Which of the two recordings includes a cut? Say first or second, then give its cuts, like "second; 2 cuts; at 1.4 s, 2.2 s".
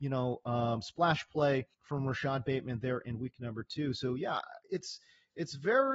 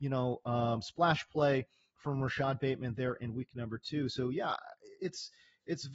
first; 2 cuts; at 1.7 s, 4.6 s